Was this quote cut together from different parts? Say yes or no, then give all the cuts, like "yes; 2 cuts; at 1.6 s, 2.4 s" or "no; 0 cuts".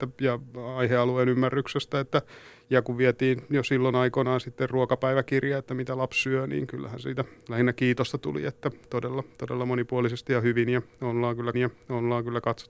yes; 1 cut; at 11.5 s